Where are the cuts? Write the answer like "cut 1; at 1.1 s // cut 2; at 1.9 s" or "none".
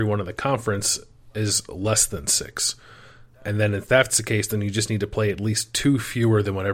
none